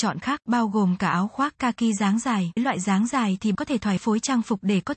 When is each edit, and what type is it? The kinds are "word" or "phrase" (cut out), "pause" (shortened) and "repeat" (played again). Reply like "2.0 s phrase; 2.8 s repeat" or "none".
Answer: 2.6 s word; 3.5 s word; 4.0 s word